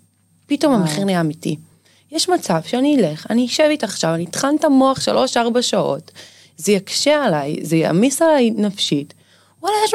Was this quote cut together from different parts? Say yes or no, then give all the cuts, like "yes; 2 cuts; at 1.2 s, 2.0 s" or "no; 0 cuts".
no; 0 cuts